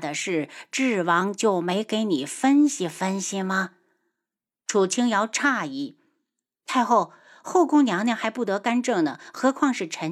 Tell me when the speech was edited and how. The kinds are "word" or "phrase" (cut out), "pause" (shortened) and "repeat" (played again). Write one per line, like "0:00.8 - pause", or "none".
none